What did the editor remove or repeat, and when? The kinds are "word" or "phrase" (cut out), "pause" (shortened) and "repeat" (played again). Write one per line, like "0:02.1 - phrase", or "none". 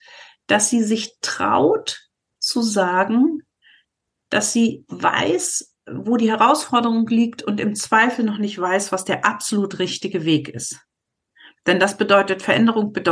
none

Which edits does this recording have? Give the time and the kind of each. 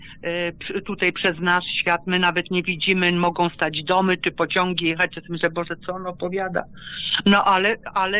none

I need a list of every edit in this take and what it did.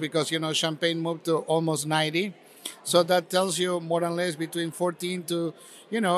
none

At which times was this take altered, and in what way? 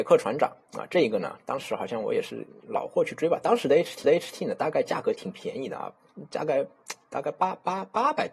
0:02.6 - pause
0:04.0 - repeat

